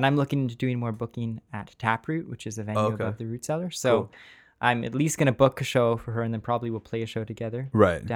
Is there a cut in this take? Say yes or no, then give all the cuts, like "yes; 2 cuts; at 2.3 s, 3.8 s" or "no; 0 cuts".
no; 0 cuts